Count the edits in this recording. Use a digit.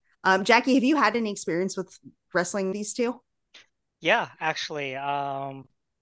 1